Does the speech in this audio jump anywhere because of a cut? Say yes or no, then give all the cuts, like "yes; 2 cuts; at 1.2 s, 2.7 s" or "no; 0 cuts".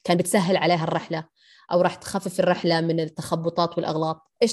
no; 0 cuts